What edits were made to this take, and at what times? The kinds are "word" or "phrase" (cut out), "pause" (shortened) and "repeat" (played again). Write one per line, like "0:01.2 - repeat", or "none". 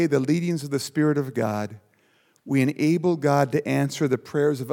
none